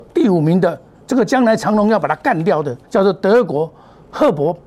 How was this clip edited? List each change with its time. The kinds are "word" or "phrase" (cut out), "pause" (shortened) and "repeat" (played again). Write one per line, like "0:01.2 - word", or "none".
0:02.8 - pause